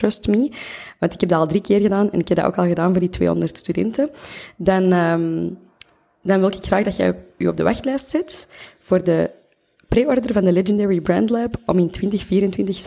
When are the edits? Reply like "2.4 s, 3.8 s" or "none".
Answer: none